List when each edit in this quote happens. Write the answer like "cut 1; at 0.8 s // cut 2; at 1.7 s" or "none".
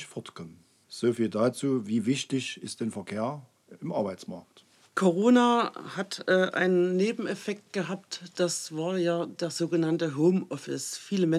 cut 1; at 4.7 s